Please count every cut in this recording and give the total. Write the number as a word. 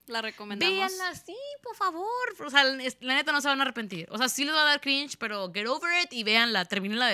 zero